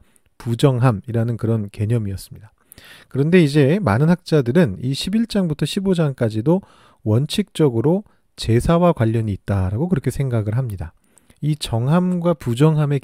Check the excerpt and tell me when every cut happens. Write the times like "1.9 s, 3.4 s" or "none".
none

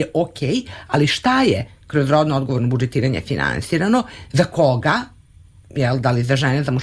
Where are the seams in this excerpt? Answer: none

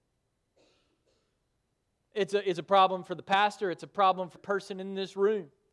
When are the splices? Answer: 4.4 s

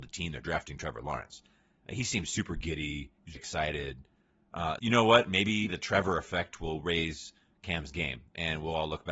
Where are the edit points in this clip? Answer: 3.3 s, 4.8 s, 5.7 s

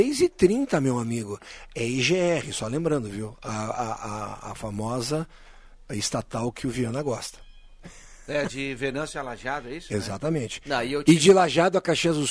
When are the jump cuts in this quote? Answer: none

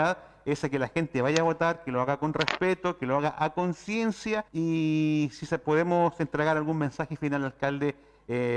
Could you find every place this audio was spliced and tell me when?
4.5 s

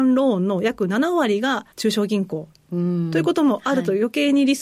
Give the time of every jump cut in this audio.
1.7 s

